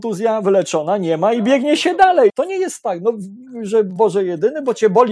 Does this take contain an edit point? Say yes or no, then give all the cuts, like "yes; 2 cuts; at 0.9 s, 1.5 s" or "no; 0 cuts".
yes; 1 cut; at 2.3 s